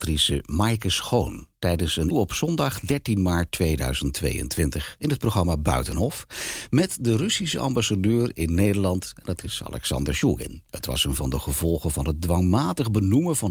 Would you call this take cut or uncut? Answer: cut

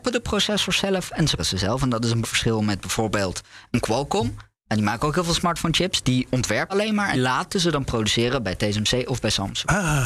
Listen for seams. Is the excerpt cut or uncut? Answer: cut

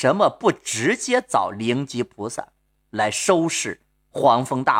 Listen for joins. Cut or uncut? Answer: uncut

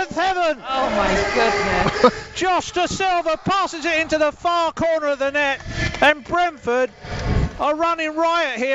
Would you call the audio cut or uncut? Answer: uncut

